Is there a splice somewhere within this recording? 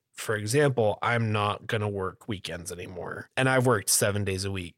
no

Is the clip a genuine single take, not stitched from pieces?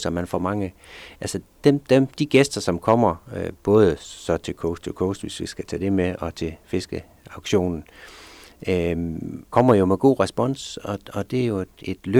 no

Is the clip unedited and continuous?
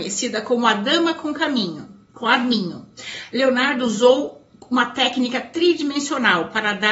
no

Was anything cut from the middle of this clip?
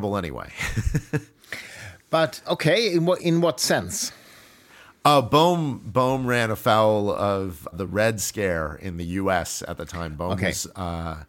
yes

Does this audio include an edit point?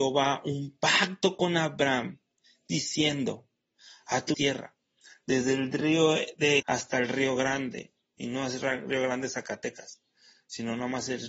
yes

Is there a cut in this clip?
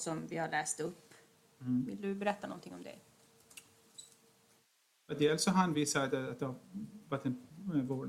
no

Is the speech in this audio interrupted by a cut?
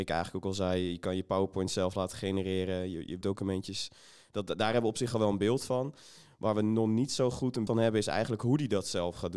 yes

